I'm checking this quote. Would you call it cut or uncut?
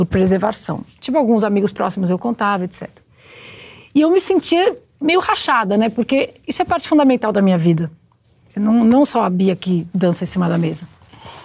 uncut